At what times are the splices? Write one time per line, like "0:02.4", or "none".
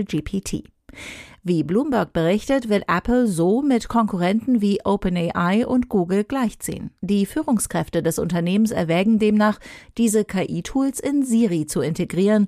0:07.0